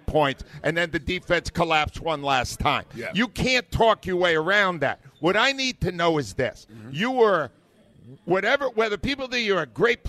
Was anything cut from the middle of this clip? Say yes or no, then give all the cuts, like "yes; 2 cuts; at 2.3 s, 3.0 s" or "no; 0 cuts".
no; 0 cuts